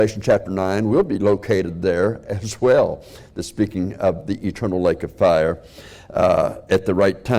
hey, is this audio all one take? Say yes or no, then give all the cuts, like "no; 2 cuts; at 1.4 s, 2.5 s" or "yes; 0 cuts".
yes; 0 cuts